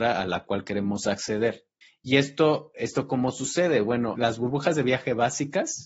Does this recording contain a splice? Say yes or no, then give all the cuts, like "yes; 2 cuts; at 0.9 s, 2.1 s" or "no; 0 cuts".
yes; 1 cut; at 1.8 s